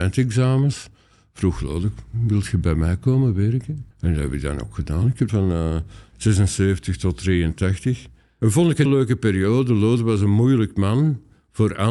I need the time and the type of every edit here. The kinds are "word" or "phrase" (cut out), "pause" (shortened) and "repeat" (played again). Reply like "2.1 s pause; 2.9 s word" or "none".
3.9 s pause; 5.3 s phrase; 8.9 s word